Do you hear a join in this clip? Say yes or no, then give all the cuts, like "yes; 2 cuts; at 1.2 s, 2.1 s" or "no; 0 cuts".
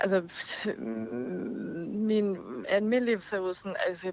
yes; 2 cuts; at 2.6 s, 3.2 s